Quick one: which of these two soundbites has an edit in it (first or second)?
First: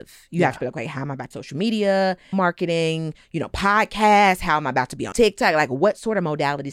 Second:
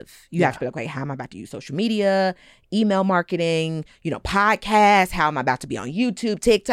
first